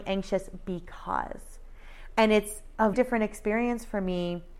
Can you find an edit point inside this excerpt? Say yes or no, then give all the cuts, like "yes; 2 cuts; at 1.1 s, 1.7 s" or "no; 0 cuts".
yes; 1 cut; at 2.9 s